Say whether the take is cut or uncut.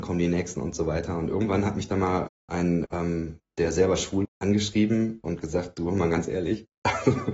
cut